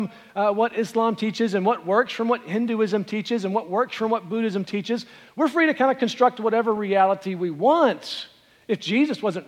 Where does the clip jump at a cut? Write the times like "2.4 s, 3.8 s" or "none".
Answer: none